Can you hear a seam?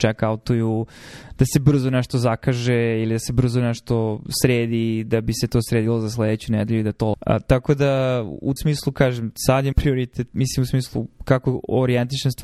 yes; 3 cuts; at 7.1 s, 8.6 s, 9.7 s

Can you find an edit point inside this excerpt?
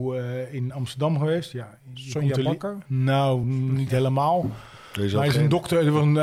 no; 0 cuts

